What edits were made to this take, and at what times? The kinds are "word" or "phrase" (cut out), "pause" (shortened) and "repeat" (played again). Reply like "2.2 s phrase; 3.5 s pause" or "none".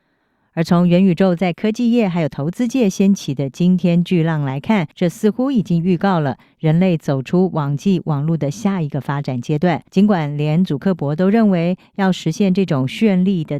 4.9 s pause; 9.9 s pause